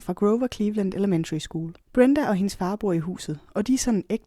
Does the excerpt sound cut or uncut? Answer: cut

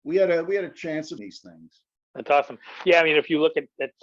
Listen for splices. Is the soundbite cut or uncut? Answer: cut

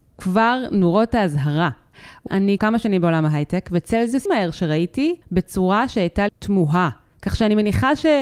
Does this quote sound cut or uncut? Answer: cut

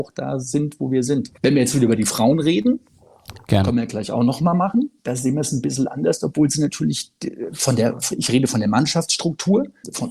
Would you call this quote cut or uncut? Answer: cut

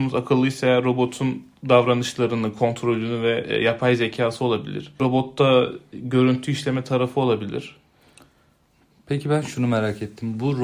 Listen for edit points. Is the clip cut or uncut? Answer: uncut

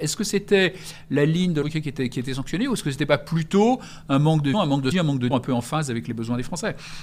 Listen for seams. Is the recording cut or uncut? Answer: cut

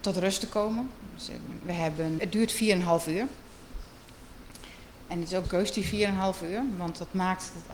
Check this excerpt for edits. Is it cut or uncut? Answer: cut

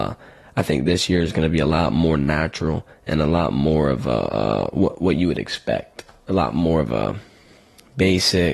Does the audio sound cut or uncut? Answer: uncut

